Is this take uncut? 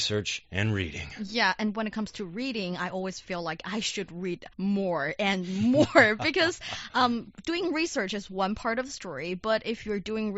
no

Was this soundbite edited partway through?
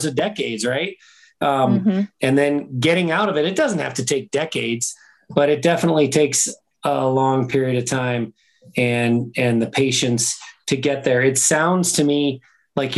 no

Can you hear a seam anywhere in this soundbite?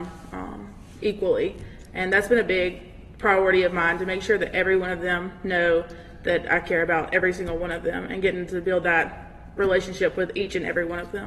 no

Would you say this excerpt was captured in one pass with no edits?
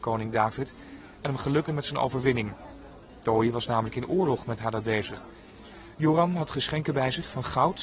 no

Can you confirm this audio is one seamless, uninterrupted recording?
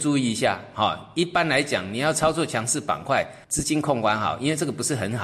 no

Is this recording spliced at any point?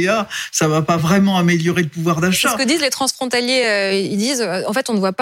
no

